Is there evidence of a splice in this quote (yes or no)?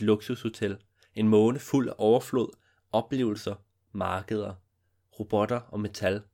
no